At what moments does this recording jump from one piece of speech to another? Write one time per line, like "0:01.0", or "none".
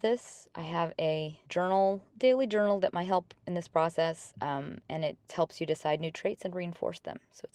0:01.5
0:05.3